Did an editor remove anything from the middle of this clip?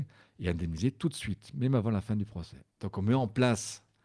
yes; 1 cut; at 2.7 s

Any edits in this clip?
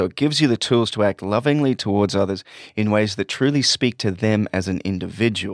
no; 0 cuts

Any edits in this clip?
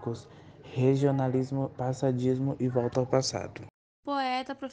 yes; 1 cut; at 1.7 s

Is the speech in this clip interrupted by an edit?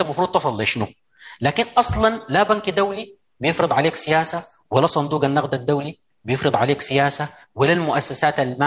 no; 0 cuts

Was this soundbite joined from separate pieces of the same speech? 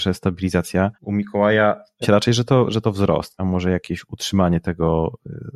yes; 3 cuts; at 0.9 s, 2.0 s, 3.4 s

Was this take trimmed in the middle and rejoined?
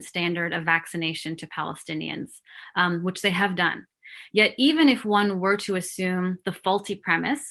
no; 0 cuts

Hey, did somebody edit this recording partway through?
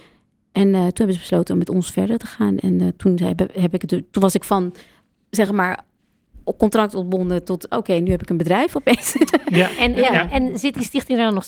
no; 0 cuts

